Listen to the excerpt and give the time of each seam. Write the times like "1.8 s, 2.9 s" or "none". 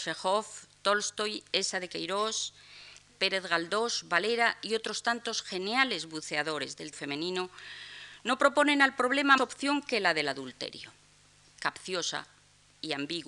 3.1 s, 6.9 s, 9.4 s, 11.4 s